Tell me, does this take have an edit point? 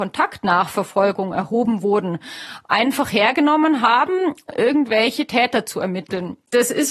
yes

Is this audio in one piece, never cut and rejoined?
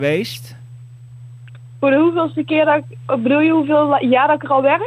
yes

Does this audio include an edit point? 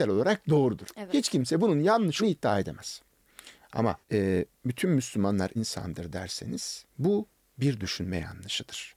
yes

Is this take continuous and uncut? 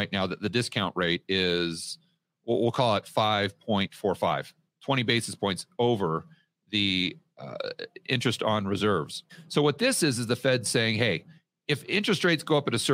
yes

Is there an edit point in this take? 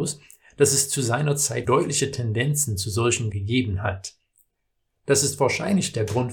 yes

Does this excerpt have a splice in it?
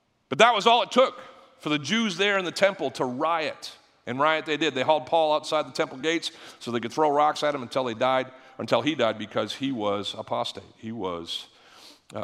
no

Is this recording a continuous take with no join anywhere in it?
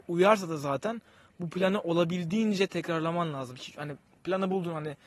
yes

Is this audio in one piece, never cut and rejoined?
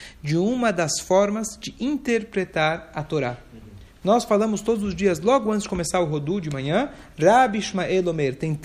yes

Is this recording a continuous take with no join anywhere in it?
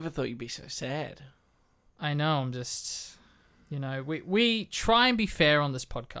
yes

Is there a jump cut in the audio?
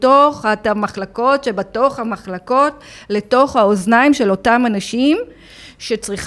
no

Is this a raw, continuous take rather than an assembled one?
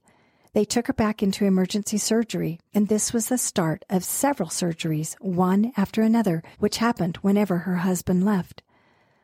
no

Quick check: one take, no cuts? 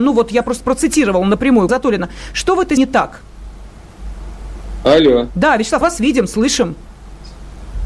no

